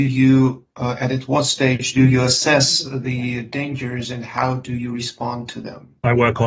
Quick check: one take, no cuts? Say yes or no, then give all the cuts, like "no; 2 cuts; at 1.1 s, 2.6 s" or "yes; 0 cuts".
yes; 0 cuts